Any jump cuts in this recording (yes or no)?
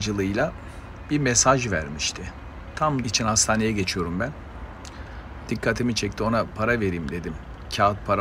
yes